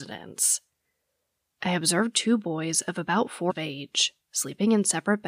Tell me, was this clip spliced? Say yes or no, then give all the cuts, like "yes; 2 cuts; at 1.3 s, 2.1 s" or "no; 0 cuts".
yes; 1 cut; at 3.5 s